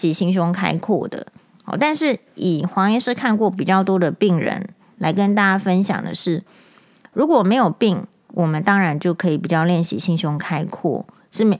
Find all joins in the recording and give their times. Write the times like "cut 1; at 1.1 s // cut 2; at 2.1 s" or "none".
none